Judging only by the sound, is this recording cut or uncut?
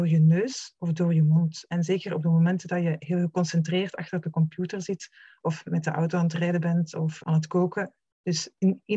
cut